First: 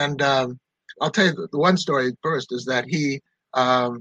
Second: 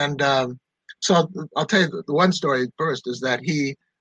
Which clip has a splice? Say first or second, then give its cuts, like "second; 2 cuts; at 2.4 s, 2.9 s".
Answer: first; 1 cut; at 0.9 s